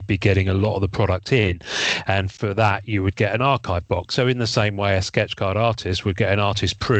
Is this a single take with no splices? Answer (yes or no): yes